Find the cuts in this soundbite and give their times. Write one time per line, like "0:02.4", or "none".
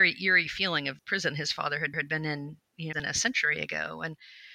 0:01.0
0:01.9
0:02.9